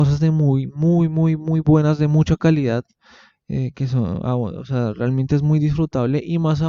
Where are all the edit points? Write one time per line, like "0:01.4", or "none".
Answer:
none